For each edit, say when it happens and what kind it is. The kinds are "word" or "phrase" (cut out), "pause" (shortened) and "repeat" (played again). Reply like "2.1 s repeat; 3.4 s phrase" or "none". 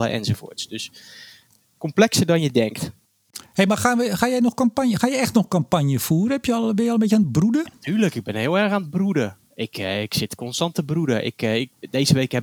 none